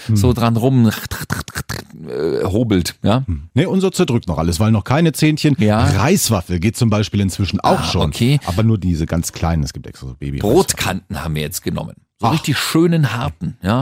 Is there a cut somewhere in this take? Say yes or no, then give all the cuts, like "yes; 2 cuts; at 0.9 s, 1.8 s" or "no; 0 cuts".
yes; 1 cut; at 3.5 s